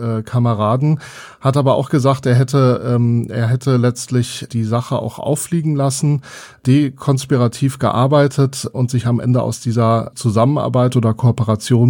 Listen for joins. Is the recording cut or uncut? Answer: uncut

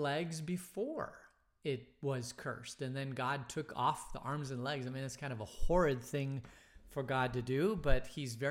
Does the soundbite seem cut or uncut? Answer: uncut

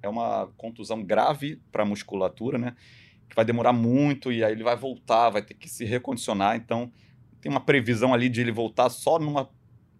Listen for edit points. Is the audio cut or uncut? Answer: uncut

